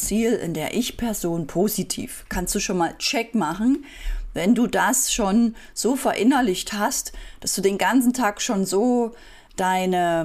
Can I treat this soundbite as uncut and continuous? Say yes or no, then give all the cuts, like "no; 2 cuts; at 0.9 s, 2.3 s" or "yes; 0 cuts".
yes; 0 cuts